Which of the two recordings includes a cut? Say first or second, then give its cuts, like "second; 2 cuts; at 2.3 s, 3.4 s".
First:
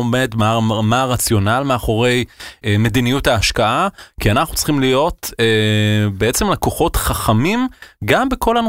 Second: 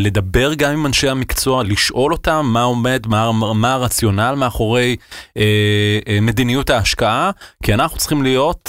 first; 1 cut; at 2.6 s